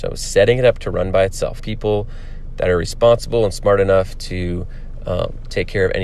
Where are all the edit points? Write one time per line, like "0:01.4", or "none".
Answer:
0:01.6